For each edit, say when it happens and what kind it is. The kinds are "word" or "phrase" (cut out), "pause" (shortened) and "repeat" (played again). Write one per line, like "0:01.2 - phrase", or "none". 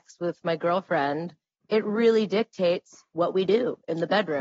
none